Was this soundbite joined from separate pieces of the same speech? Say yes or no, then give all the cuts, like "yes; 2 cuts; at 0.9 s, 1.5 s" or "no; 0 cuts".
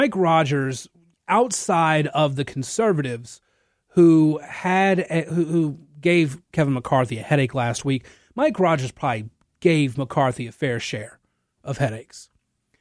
no; 0 cuts